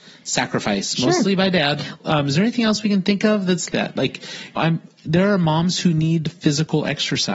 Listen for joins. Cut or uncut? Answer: cut